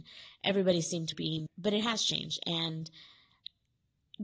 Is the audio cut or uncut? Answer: cut